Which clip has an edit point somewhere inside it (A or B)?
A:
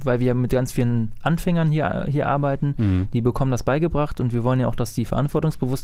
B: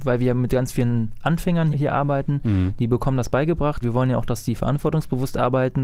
B